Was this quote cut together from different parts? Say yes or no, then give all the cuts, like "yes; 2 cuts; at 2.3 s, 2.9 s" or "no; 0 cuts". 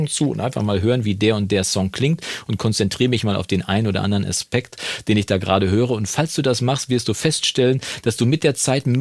no; 0 cuts